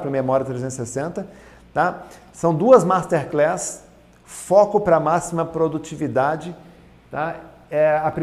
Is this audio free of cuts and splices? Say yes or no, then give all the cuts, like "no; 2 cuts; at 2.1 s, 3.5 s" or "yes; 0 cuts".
yes; 0 cuts